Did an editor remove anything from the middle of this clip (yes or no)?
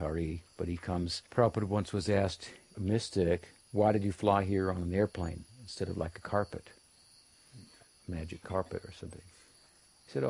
yes